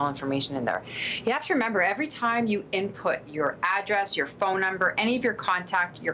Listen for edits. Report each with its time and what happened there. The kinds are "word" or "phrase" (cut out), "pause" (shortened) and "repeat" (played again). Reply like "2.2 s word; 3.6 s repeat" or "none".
none

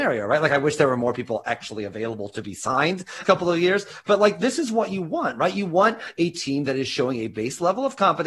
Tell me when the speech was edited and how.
3.2 s phrase

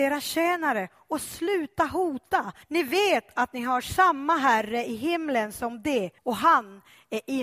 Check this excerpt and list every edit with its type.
2.6 s pause; 6.2 s pause

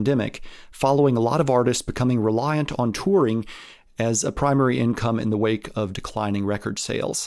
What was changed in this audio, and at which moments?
none

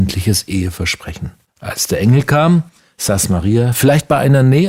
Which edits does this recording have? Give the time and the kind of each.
1.5 s pause

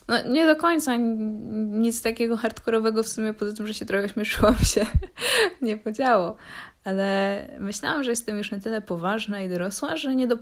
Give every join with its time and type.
none

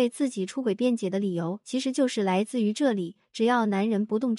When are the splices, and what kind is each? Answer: none

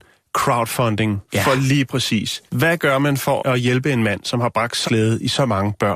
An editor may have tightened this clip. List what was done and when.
1.2 s pause; 2.5 s pause; 3.4 s word; 4.9 s word

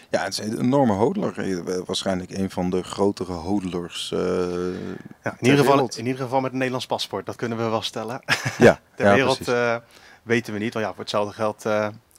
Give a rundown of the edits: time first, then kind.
none

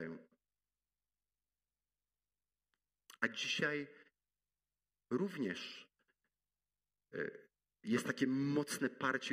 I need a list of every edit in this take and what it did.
none

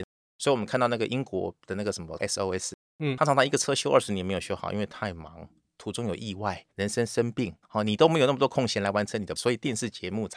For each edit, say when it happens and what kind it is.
2.2 s word; 6.7 s pause; 7.6 s pause; 9.4 s word

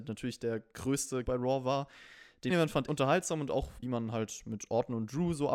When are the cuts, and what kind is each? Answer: 1.2 s word; 2.5 s word; 2.9 s word; 3.8 s word

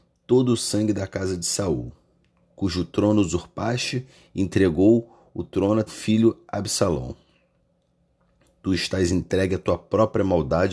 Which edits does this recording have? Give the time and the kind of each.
5.9 s word

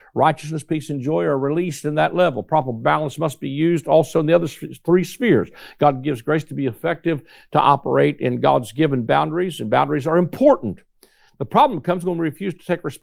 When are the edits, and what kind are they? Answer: none

